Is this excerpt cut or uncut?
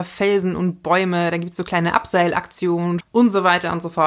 cut